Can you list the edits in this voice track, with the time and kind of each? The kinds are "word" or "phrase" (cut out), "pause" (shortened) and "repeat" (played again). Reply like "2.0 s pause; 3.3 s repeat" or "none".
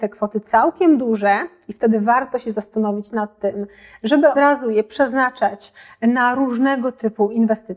4.4 s word